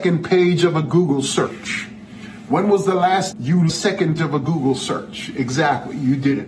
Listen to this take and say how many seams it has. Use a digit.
3